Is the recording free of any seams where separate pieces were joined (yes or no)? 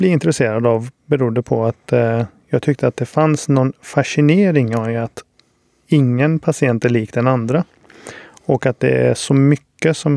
yes